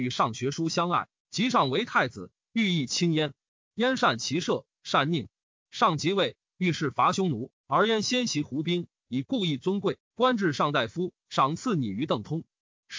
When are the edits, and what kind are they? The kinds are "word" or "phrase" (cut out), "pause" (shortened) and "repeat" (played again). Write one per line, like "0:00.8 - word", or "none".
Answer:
0:01.2 - pause